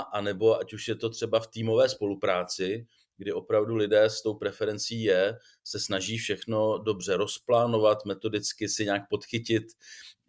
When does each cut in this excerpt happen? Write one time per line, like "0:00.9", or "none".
none